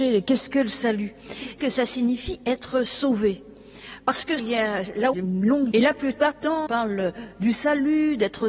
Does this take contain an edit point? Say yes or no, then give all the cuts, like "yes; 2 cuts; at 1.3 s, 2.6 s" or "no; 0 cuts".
yes; 6 cuts; at 1.6 s, 4.4 s, 5.1 s, 5.7 s, 6.3 s, 6.7 s